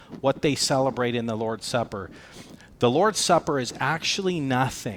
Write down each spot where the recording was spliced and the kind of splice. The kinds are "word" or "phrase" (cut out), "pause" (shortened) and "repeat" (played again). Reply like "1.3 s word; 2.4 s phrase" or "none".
none